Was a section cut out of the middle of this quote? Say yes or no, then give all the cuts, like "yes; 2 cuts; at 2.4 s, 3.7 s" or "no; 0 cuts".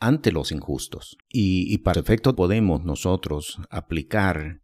yes; 3 cuts; at 1.2 s, 1.9 s, 2.3 s